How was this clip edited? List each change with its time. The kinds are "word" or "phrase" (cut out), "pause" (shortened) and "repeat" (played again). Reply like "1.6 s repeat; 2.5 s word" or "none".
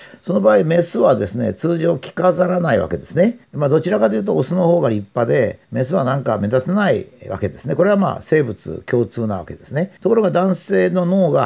3.4 s pause; 5.6 s pause; 10.0 s pause